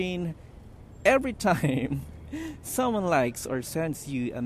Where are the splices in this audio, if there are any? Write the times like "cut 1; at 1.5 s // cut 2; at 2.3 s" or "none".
none